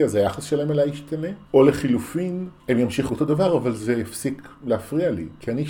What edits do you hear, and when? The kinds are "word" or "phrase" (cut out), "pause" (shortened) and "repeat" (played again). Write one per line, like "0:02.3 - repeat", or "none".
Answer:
0:01.5 - pause
0:02.6 - pause
0:03.1 - word